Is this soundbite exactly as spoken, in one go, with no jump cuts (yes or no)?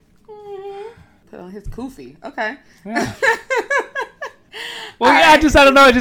yes